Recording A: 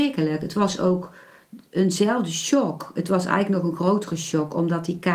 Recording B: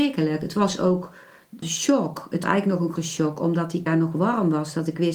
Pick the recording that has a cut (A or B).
B